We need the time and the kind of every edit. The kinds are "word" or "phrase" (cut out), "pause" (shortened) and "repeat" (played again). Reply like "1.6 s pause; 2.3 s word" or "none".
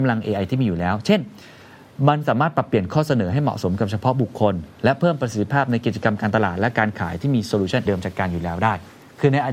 7.9 s word